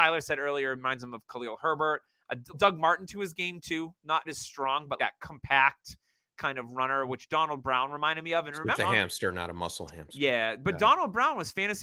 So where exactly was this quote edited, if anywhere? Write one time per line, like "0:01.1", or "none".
0:02.5
0:04.2
0:05.0
0:08.8